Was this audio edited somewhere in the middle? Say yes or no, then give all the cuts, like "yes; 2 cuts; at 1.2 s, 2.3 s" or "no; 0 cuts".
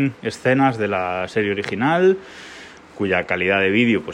no; 0 cuts